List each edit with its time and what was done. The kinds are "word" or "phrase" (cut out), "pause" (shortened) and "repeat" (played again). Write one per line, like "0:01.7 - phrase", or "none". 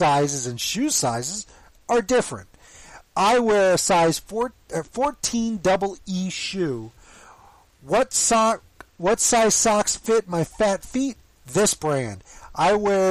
none